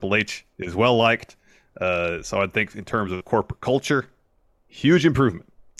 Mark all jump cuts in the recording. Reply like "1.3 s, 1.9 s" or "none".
none